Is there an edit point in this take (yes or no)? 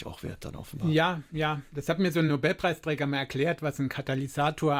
no